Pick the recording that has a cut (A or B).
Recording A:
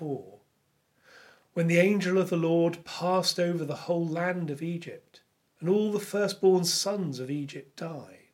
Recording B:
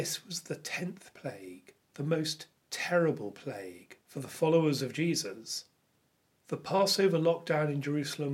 B